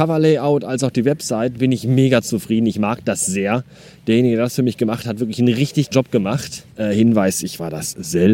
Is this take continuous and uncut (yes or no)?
no